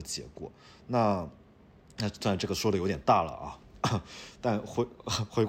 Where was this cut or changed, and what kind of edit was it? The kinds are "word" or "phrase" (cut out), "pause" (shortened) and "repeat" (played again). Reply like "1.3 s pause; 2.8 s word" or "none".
none